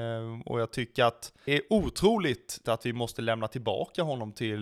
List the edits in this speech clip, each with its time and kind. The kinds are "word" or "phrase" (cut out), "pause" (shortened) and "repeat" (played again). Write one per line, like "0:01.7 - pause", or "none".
0:01.5 - word
0:02.6 - word